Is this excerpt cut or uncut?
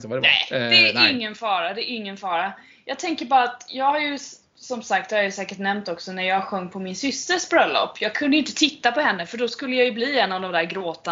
uncut